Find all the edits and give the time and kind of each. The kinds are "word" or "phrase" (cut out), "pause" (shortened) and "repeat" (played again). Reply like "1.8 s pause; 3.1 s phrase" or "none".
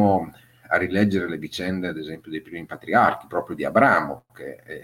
none